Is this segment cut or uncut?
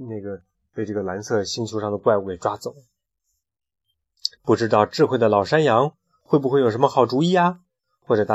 cut